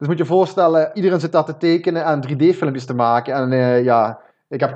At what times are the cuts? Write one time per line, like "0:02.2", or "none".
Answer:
0:00.9